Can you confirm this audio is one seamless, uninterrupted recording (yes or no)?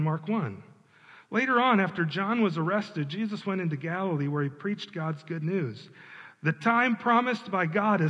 yes